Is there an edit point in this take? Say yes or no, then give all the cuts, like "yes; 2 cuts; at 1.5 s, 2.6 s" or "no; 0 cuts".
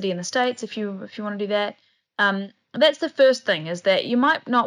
no; 0 cuts